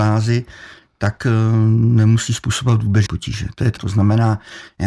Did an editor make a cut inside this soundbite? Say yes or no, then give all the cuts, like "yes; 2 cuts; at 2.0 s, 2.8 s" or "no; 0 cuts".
yes; 2 cuts; at 3.1 s, 3.8 s